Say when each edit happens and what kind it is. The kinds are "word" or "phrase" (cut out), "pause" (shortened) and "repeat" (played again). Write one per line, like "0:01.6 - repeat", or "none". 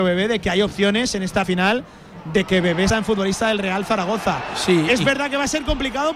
0:01.4 - word
0:02.9 - phrase